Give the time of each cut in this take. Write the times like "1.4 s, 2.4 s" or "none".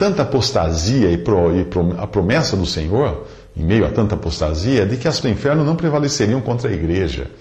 5.2 s

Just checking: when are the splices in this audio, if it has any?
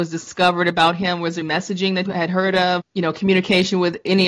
1.4 s, 2.1 s

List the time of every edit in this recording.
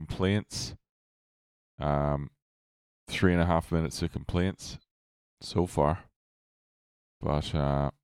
none

